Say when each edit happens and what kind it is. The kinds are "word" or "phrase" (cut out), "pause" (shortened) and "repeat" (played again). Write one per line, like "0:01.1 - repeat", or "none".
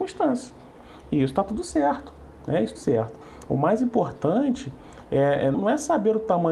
0:02.8 - word
0:05.5 - word